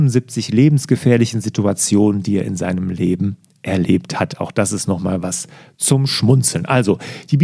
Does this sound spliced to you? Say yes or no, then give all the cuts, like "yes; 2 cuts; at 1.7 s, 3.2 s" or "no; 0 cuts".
no; 0 cuts